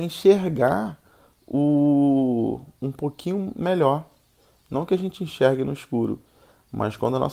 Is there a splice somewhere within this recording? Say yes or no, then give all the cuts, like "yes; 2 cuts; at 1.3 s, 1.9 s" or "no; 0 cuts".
no; 0 cuts